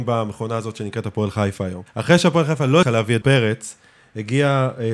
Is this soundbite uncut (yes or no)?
no